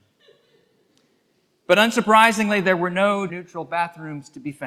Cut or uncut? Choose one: cut